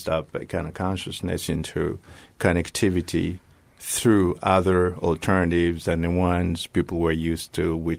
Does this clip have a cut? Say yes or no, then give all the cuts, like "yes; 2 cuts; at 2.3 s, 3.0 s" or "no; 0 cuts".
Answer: no; 0 cuts